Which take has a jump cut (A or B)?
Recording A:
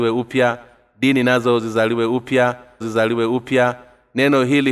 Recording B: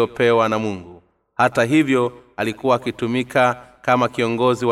A